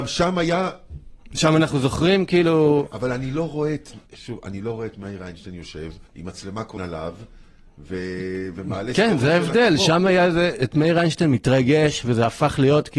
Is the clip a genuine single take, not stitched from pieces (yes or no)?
no